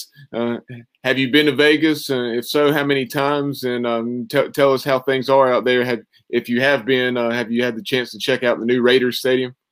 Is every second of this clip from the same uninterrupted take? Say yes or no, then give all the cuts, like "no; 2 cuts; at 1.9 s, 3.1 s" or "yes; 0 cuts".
yes; 0 cuts